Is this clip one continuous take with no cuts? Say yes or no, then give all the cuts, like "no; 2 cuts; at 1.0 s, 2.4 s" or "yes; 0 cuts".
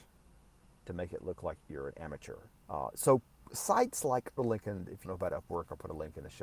no; 4 cuts; at 1.6 s, 2.6 s, 4.4 s, 5.1 s